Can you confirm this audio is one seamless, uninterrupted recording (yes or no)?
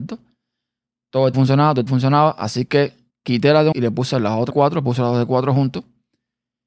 no